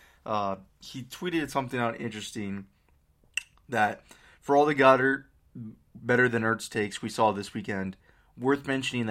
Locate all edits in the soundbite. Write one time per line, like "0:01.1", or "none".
none